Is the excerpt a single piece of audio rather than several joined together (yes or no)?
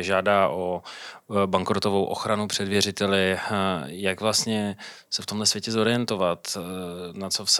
yes